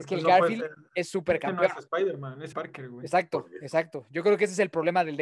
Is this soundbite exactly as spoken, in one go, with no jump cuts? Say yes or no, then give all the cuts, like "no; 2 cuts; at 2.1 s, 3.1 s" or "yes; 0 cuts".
no; 1 cut; at 2.5 s